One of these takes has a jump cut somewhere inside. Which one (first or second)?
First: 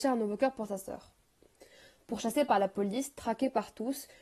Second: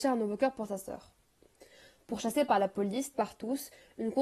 second